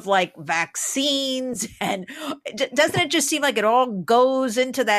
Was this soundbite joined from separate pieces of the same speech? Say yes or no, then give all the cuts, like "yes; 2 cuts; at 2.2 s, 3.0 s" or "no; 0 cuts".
no; 0 cuts